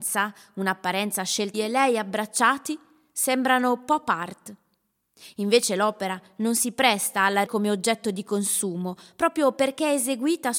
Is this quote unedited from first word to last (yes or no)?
no